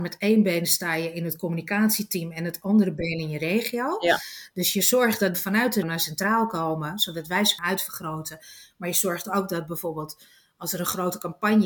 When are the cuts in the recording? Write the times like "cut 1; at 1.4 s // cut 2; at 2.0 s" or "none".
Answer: cut 1; at 5.3 s // cut 2; at 5.8 s // cut 3; at 7.6 s